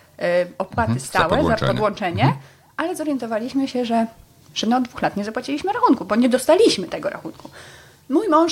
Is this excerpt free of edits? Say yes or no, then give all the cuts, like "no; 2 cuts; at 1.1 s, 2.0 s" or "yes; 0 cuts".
yes; 0 cuts